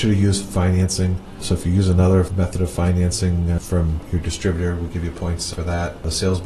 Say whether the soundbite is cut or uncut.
uncut